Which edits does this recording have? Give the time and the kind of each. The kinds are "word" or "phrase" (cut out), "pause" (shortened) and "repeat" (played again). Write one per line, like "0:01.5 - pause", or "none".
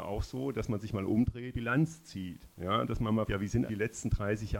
0:01.5 - word
0:02.5 - pause
0:03.3 - word
0:03.7 - word